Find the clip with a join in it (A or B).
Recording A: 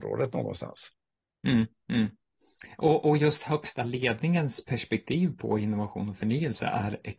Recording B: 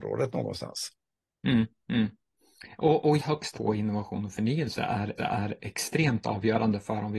B